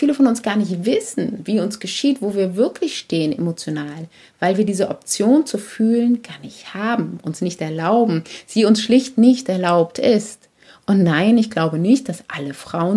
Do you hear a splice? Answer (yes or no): no